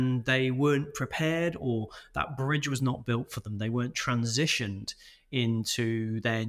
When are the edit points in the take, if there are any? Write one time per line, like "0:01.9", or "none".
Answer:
none